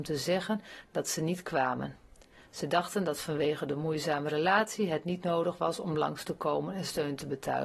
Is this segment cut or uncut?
uncut